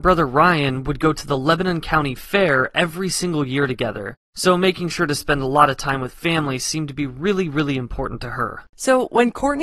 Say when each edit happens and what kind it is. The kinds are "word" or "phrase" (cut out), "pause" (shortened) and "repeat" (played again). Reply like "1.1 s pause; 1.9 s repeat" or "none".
8.7 s pause